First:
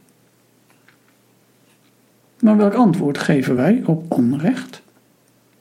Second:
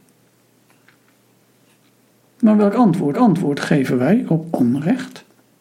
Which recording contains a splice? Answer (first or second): second